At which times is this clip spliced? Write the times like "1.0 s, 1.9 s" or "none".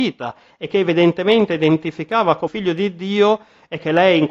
2.5 s